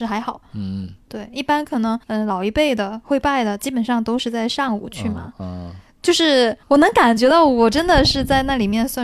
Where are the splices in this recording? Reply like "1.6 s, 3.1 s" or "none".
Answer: 2.0 s, 6.6 s